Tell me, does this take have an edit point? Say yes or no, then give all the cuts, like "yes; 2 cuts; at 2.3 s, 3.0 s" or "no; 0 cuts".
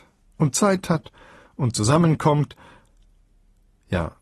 no; 0 cuts